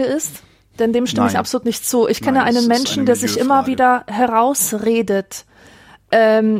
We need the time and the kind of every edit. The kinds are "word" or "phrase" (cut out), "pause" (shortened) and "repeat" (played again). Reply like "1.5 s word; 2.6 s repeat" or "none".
none